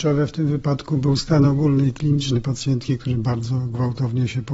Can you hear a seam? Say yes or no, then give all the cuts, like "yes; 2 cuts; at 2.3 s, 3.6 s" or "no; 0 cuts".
no; 0 cuts